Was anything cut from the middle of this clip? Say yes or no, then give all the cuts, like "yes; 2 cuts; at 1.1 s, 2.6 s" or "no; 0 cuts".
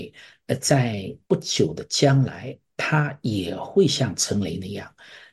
yes; 1 cut; at 1.2 s